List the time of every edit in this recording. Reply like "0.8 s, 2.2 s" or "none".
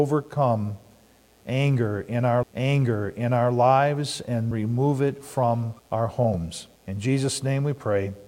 2.4 s, 4.5 s, 5.8 s, 6.8 s